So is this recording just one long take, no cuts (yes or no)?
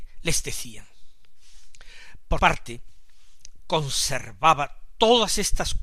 no